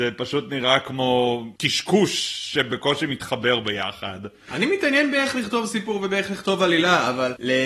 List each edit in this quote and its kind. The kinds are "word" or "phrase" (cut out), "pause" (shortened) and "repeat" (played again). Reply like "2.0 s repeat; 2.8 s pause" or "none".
1.6 s pause